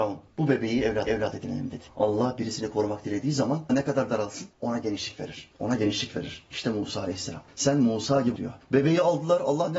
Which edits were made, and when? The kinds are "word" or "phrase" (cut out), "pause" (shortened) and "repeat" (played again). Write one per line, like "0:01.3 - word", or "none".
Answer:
0:01.1 - repeat
0:03.7 - word
0:04.1 - word
0:08.4 - word